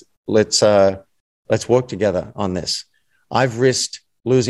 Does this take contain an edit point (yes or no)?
no